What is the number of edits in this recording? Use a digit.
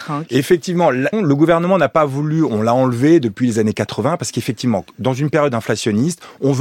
1